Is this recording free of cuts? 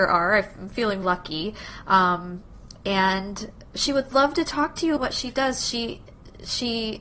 no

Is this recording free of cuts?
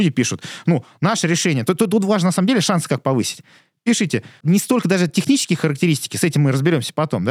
yes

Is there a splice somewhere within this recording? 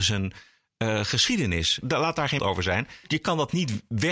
yes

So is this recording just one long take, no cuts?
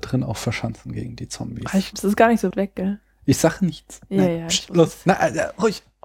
no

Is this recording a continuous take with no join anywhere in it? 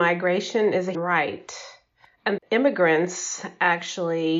no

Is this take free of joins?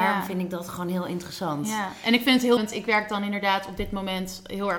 no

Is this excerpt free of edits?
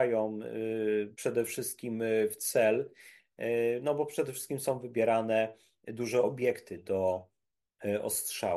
no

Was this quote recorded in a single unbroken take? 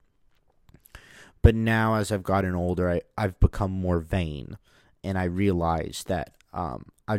yes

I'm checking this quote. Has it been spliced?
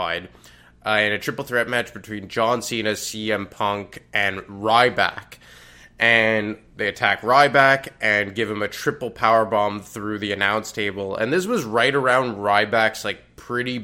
no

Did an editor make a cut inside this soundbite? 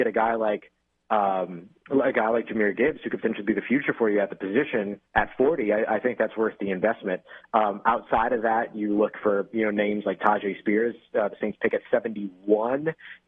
yes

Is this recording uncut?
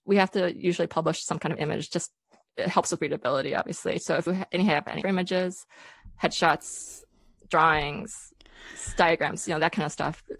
no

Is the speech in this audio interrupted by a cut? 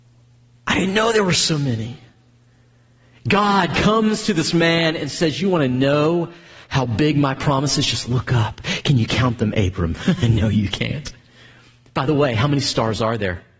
no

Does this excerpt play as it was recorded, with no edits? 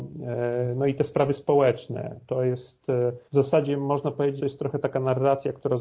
no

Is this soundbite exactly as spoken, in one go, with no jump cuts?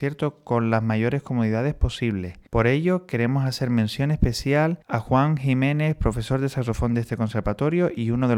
no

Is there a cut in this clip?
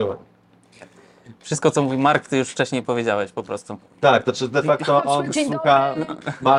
no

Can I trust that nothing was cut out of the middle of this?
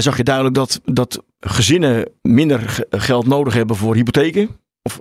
yes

